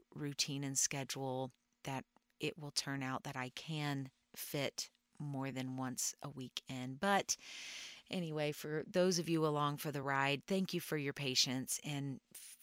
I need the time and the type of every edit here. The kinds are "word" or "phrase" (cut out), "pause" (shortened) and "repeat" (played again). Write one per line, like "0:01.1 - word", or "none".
none